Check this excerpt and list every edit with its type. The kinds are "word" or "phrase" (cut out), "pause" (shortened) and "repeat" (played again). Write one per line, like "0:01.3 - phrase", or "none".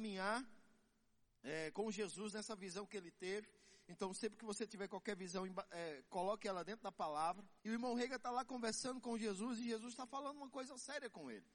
0:07.6 - pause